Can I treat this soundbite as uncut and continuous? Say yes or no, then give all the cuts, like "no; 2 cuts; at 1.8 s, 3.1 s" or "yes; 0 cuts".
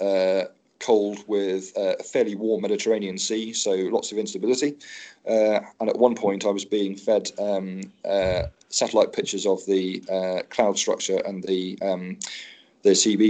yes; 0 cuts